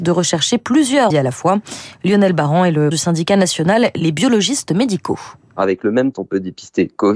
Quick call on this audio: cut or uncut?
cut